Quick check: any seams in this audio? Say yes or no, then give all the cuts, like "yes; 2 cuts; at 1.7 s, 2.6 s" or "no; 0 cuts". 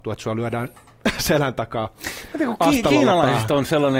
no; 0 cuts